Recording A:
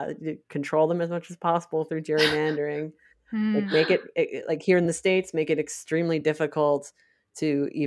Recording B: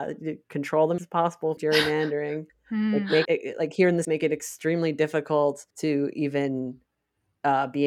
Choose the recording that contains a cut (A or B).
B